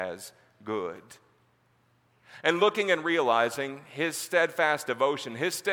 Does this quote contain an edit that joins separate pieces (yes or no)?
no